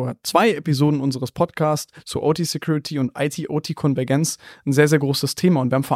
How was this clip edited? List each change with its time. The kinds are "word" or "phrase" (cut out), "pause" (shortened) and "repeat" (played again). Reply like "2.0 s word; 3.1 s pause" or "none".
none

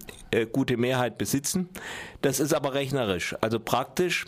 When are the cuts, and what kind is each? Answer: none

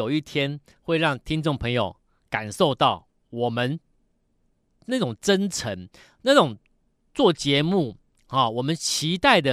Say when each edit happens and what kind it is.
none

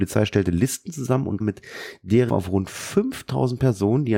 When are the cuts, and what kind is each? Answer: 1.4 s word; 2.3 s word

